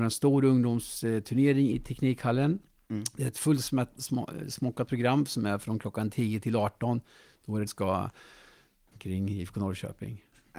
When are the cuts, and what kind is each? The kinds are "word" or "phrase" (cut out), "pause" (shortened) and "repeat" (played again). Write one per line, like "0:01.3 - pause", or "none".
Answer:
0:01.7 - word
0:07.7 - word
0:08.9 - word